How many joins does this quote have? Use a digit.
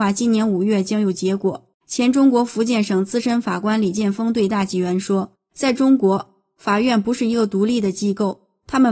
2